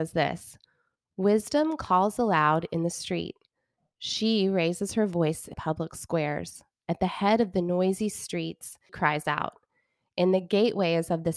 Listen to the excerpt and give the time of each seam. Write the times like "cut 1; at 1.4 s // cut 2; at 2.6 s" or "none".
cut 1; at 5.5 s // cut 2; at 8.9 s